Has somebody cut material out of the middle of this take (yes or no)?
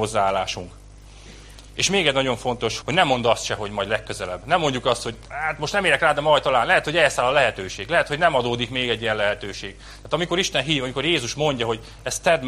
yes